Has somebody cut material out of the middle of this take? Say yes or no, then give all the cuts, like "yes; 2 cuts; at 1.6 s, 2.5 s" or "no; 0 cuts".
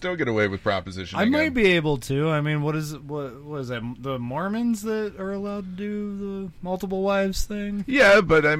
no; 0 cuts